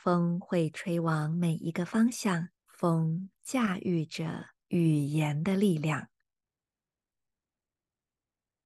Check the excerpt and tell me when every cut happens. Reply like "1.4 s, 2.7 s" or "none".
2.6 s, 4.6 s